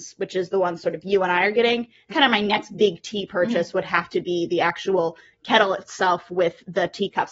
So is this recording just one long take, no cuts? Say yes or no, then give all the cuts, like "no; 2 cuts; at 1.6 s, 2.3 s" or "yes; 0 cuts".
no; 1 cut; at 2.1 s